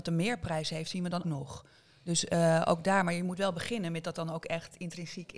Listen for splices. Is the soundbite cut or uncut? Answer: cut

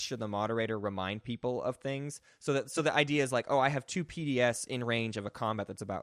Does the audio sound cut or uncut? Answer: uncut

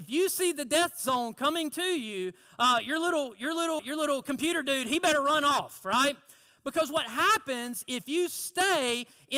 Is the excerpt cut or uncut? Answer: cut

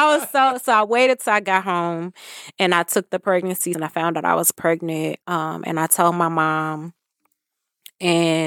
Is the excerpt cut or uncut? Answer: cut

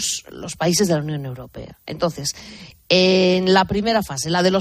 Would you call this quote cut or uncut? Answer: uncut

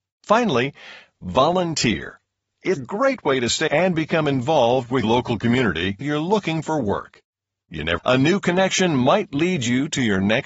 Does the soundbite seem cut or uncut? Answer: cut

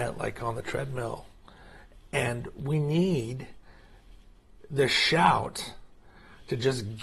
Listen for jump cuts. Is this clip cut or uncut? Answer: uncut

